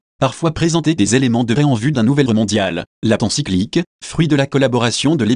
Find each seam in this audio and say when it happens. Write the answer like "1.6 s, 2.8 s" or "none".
1.0 s, 1.6 s, 1.9 s, 2.3 s, 3.2 s

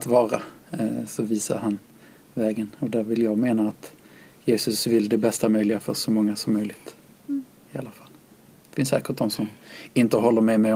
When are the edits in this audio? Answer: none

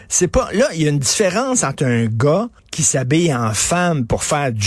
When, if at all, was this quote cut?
2.6 s

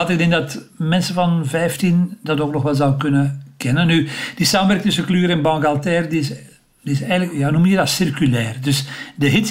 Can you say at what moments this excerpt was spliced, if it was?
none

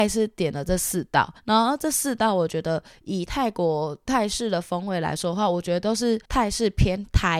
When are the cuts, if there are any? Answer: 1.4 s, 6.2 s

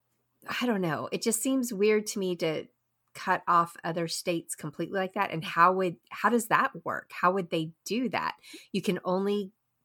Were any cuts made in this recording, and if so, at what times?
none

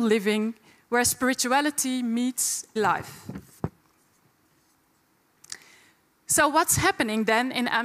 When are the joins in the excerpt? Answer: 2.8 s

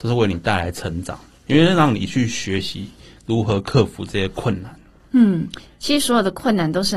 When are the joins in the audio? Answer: none

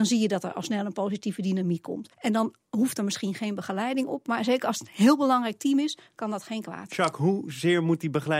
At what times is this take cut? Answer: 2.1 s

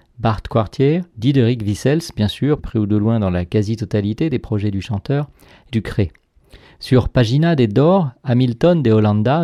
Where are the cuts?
1.1 s, 2.6 s, 5.7 s

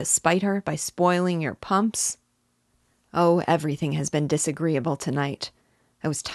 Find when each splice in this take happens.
none

